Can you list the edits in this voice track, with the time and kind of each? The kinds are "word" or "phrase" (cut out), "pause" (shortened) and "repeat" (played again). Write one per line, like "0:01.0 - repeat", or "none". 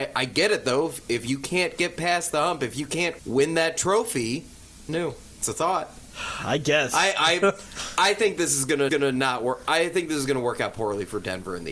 0:03.2 - word
0:04.9 - phrase
0:08.9 - repeat